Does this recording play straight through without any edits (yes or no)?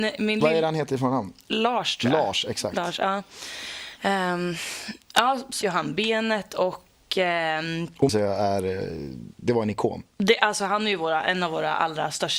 no